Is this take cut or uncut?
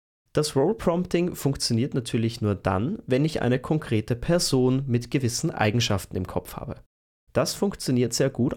uncut